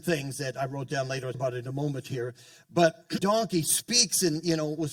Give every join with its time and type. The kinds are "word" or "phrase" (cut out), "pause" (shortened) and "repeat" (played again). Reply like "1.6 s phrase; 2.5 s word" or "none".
1.3 s word; 3.2 s word